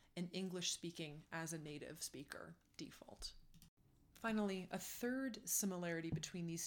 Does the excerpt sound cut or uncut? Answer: uncut